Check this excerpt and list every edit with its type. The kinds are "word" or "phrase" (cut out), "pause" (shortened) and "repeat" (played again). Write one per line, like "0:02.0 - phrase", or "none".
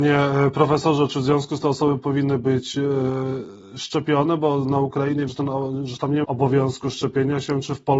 0:01.6 - word
0:05.3 - word
0:06.2 - word